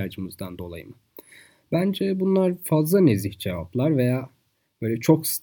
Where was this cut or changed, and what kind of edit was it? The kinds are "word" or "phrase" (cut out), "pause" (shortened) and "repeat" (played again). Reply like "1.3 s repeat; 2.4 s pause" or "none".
none